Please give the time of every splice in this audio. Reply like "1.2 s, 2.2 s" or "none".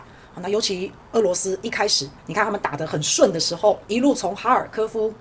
1.0 s, 2.2 s, 3.8 s